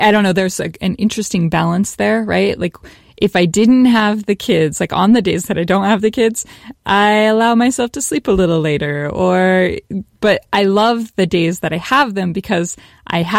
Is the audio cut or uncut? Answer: uncut